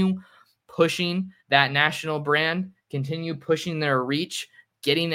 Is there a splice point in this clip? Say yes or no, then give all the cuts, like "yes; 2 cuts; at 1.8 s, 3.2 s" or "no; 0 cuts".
yes; 1 cut; at 1.4 s